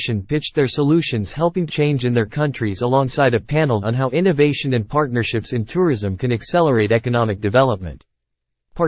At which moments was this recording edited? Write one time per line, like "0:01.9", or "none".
0:01.7
0:03.8